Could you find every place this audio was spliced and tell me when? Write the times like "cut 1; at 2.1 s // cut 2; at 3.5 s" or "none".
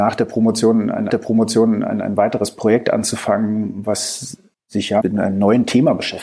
cut 1; at 1.1 s // cut 2; at 4.5 s // cut 3; at 5.0 s

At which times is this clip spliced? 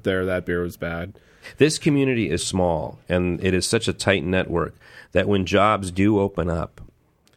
cut 1; at 2.4 s

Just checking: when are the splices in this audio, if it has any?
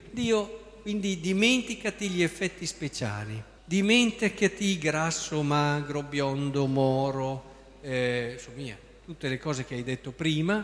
cut 1; at 3.6 s

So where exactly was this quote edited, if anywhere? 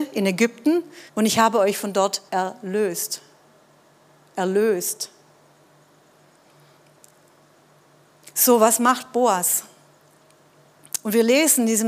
cut 1; at 1.1 s // cut 2; at 2.3 s

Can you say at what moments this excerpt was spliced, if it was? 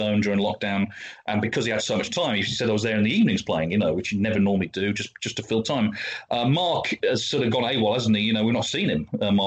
none

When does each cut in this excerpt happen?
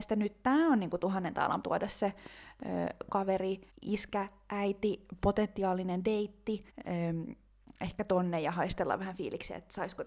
cut 1; at 1.6 s // cut 2; at 3.7 s // cut 3; at 6.7 s

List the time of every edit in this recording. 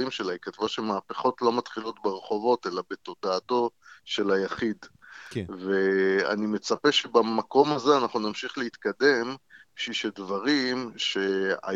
none

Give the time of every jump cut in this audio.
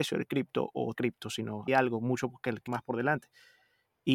cut 1; at 0.9 s // cut 2; at 1.7 s // cut 3; at 2.7 s

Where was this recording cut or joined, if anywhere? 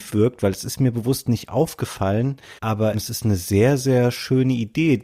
cut 1; at 2.6 s

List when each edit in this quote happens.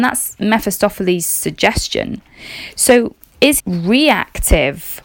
cut 1; at 3.6 s

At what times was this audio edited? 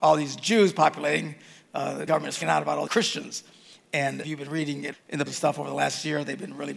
cut 1; at 2.1 s // cut 2; at 2.4 s // cut 3; at 2.9 s // cut 4; at 4.2 s // cut 5; at 4.9 s // cut 6; at 5.3 s

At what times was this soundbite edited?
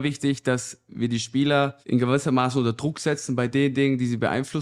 cut 1; at 1.8 s

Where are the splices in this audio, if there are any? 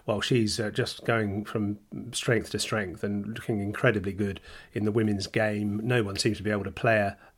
none

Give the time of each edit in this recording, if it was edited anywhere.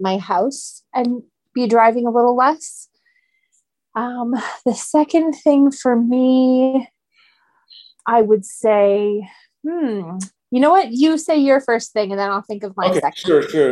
none

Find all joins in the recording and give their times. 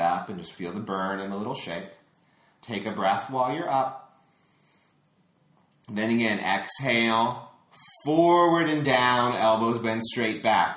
none

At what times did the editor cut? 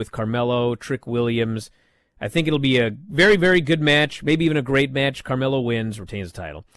none

